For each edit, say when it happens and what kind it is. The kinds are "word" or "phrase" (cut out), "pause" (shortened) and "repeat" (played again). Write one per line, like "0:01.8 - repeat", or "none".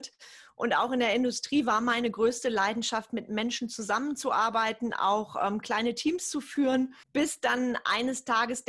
0:07.0 - pause